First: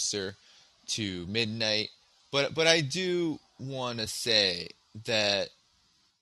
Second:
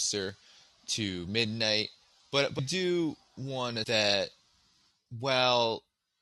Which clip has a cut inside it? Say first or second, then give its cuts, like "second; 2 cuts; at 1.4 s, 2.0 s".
second; 2 cuts; at 2.6 s, 3.8 s